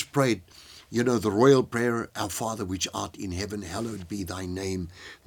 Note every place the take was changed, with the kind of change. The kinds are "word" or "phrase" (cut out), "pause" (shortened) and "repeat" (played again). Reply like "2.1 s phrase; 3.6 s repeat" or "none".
none